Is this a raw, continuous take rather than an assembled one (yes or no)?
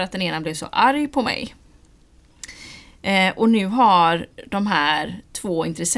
yes